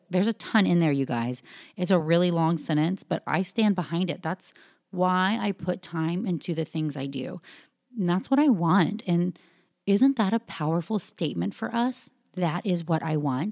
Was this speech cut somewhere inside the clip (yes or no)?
no